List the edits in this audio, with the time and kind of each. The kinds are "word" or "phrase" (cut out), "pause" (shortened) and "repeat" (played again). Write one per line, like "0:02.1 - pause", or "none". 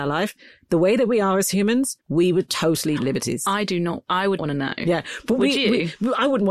0:02.0 - pause
0:03.0 - word
0:04.4 - word